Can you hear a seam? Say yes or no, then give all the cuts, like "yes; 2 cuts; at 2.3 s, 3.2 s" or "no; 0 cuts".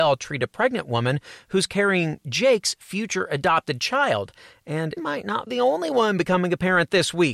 yes; 2 cuts; at 5.0 s, 5.5 s